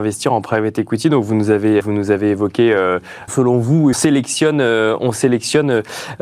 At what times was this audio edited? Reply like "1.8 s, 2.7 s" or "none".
1.8 s, 3.3 s, 3.9 s